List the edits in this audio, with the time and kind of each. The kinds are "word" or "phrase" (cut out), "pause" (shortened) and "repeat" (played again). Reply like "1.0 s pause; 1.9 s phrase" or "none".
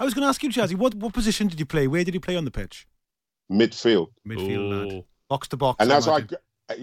none

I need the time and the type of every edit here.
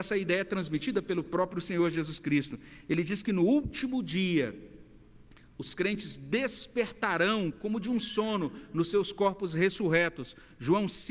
none

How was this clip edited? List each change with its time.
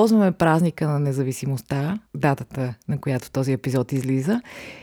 2.1 s pause

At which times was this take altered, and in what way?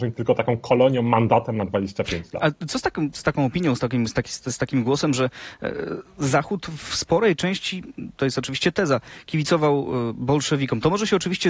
none

